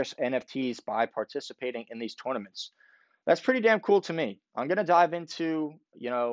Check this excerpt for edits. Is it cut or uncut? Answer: uncut